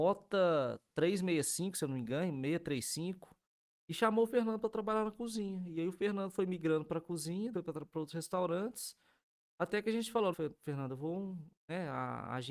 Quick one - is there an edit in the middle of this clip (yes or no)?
yes